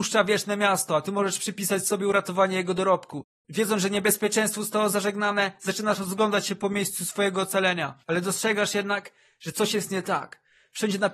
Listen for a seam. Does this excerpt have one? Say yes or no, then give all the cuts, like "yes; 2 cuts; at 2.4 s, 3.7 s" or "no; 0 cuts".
yes; 1 cut; at 8.0 s